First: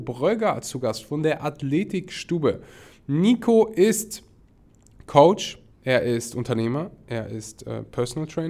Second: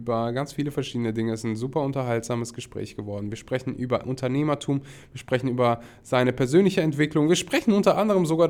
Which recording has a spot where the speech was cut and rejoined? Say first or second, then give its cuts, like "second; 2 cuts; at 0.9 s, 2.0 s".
first; 1 cut; at 5.7 s